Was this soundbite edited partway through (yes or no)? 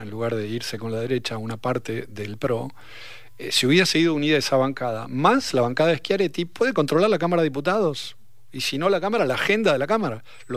no